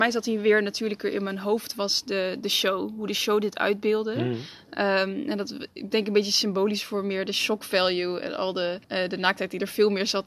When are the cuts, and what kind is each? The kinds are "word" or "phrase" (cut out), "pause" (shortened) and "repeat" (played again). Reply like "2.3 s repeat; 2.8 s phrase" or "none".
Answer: 8.8 s pause